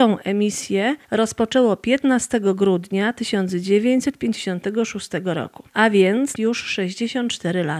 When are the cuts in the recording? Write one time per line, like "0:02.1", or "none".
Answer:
0:01.0
0:05.7
0:06.4